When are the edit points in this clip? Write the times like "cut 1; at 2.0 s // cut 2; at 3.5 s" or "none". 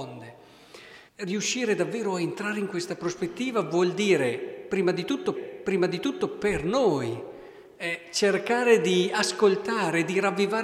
cut 1; at 1.1 s // cut 2; at 5.3 s

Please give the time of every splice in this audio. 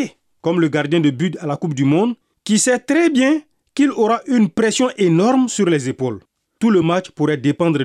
none

